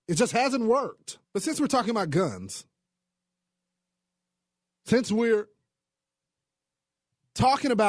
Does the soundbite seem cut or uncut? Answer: cut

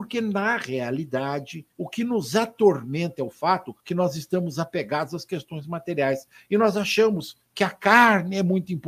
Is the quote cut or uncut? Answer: cut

